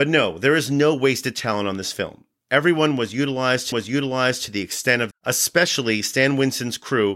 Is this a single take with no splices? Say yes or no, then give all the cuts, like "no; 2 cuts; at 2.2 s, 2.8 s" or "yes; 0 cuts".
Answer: no; 2 cuts; at 3.7 s, 5.1 s